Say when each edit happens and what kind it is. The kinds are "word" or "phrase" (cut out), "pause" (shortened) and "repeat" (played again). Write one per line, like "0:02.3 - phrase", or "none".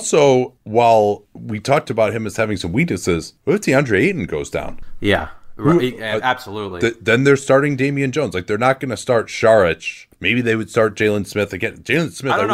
none

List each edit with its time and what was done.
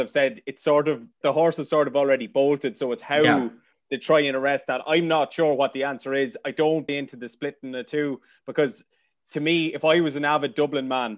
0:01.2 - word
0:06.9 - word

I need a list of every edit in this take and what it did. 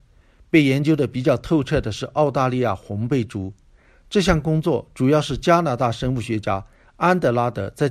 none

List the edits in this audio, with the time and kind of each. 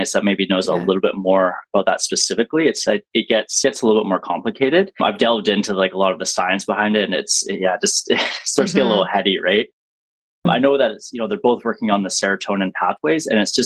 none

